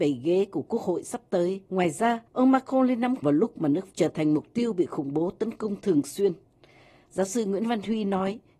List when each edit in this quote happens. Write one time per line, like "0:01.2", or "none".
0:01.7
0:02.3
0:03.2
0:03.9